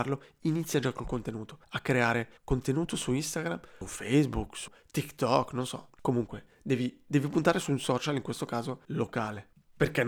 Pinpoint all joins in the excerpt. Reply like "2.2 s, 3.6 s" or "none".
1.6 s, 2.4 s, 8.8 s